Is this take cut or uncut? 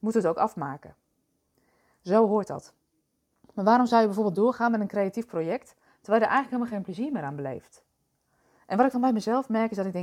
uncut